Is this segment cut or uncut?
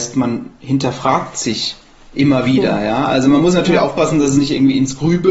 uncut